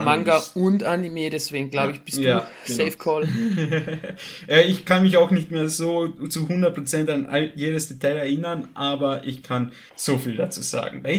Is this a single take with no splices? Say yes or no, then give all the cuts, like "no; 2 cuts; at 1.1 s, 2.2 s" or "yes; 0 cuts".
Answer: no; 1 cut; at 9.9 s